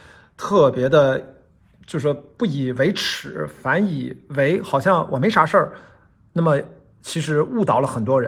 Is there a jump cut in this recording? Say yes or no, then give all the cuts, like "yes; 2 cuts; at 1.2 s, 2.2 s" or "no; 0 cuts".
no; 0 cuts